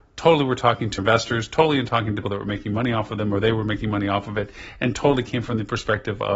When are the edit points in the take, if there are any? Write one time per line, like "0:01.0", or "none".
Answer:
0:01.0
0:02.2